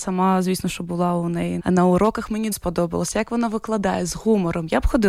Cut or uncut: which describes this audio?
cut